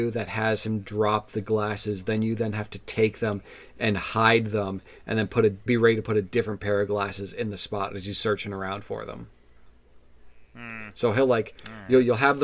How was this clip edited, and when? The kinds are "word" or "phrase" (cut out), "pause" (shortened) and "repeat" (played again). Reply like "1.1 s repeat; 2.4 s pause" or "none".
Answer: 5.7 s word

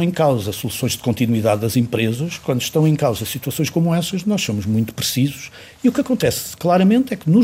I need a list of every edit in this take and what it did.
none

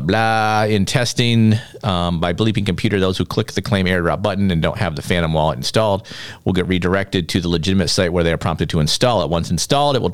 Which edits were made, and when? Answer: none

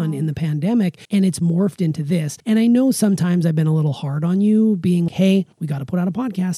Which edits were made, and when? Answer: 1.0 s pause; 2.4 s pause; 5.1 s word; 5.5 s pause

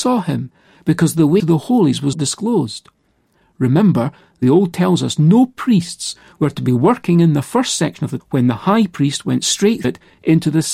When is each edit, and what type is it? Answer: 1.4 s word; 2.1 s word; 4.7 s word; 8.2 s word; 9.8 s word

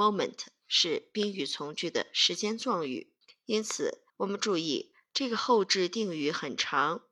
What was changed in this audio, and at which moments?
3.2 s pause; 4.1 s pause

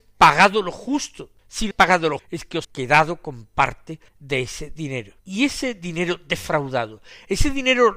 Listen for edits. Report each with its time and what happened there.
1.4 s pause; 1.7 s word; 2.2 s word; 2.6 s word; 4.1 s pause; 5.2 s pause

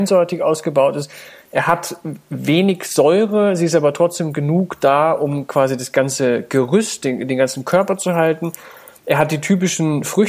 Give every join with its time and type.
none

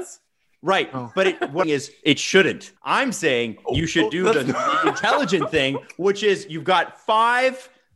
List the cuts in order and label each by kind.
1.6 s phrase; 2.8 s pause

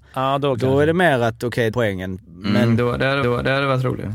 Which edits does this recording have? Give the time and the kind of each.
1.7 s word; 3.2 s repeat

